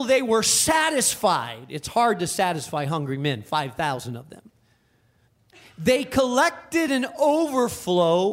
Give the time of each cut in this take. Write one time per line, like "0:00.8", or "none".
none

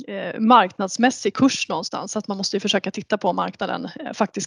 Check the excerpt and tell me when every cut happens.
none

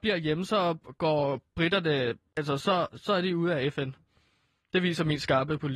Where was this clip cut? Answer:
none

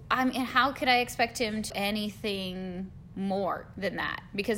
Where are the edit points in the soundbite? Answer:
0:01.7

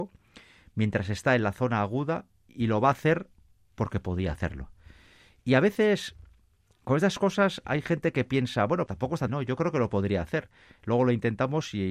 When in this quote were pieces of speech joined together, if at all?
0:08.9
0:09.3

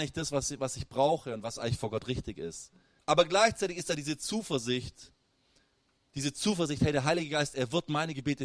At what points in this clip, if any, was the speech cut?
0:03.0

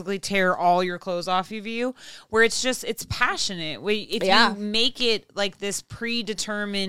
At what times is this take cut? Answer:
none

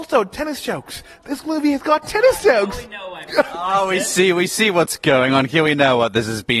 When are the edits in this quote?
none

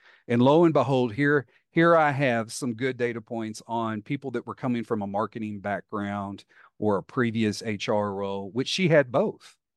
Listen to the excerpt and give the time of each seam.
none

